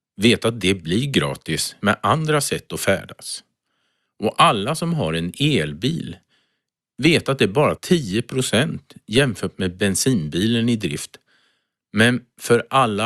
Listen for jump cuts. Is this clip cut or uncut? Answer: cut